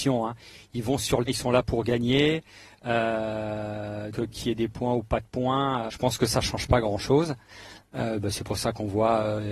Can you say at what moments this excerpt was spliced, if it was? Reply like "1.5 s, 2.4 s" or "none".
1.3 s, 4.1 s, 5.9 s